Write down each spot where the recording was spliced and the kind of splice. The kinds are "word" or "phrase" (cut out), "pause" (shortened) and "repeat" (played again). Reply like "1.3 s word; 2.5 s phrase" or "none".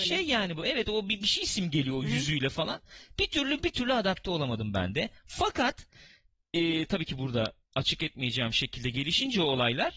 none